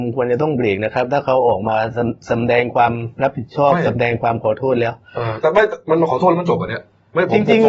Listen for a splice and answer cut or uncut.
uncut